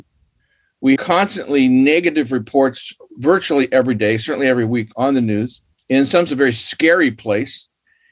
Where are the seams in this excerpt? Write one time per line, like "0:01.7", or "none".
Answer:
0:01.0
0:05.7
0:06.3